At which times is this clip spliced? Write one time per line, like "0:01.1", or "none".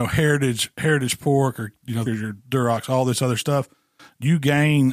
0:02.1

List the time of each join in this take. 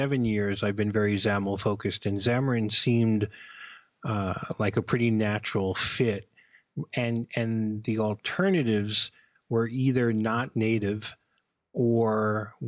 none

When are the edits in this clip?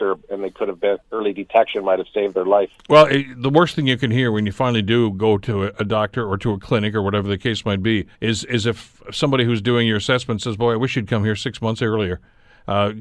0:01.0
0:08.1

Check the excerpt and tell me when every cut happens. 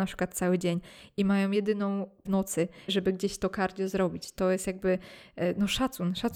0:02.3
0:02.9

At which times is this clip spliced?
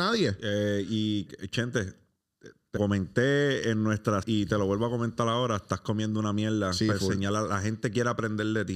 0:01.3
0:02.8
0:04.2

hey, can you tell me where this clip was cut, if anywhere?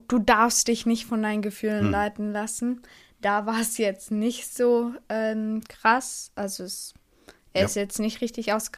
none

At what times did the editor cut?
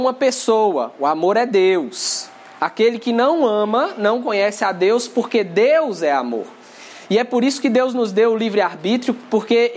none

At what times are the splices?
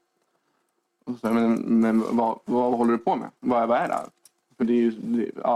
0:03.4
0:04.6

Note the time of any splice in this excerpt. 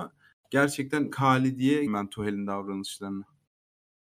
0:01.1
0:01.9

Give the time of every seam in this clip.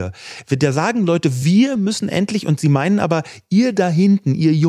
none

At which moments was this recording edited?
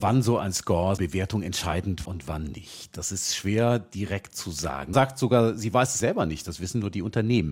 0:01.0
0:02.1
0:04.9
0:06.0

